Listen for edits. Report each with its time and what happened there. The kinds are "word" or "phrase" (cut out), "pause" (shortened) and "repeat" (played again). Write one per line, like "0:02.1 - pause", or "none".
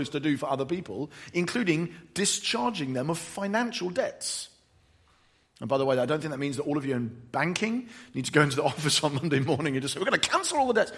none